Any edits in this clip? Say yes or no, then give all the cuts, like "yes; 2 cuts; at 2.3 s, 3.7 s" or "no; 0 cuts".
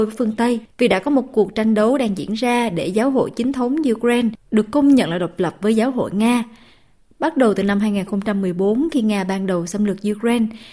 no; 0 cuts